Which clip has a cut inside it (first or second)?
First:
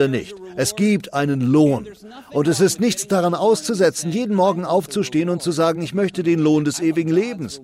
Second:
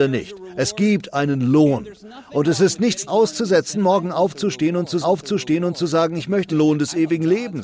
second